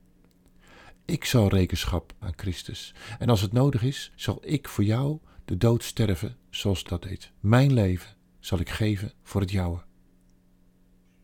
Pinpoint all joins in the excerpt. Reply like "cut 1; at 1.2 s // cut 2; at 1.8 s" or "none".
cut 1; at 2.2 s // cut 2; at 4.1 s // cut 3; at 6.9 s // cut 4; at 7.3 s // cut 5; at 9.2 s